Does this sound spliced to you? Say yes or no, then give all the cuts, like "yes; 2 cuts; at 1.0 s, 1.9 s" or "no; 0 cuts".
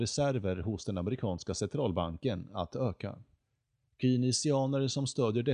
no; 0 cuts